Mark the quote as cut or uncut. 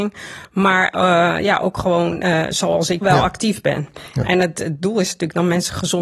cut